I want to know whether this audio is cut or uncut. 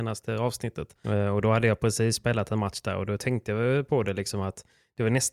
uncut